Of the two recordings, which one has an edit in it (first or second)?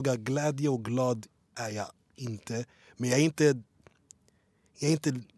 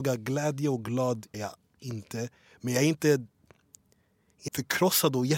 second